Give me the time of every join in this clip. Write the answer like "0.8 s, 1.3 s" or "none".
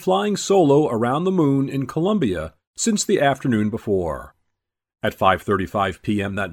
none